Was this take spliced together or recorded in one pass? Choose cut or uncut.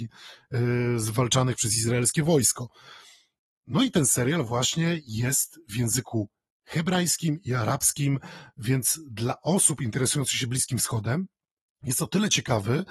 uncut